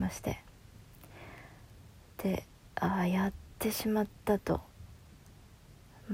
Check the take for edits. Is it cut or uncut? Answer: uncut